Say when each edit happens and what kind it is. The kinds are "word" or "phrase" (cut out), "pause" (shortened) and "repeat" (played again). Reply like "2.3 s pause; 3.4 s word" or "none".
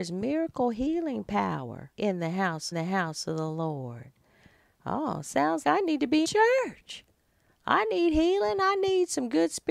1.9 s pause; 2.7 s repeat; 5.6 s word; 6.2 s word